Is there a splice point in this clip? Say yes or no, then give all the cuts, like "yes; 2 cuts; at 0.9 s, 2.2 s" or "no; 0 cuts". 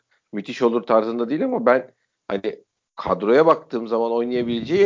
no; 0 cuts